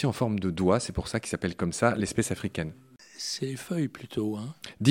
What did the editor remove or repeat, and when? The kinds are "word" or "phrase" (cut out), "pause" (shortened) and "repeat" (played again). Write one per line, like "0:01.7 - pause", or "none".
none